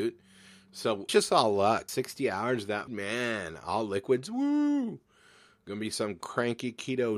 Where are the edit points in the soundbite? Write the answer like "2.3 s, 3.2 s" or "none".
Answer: 1.1 s, 1.9 s, 2.9 s